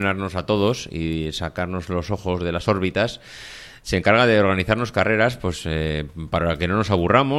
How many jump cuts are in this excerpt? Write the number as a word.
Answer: zero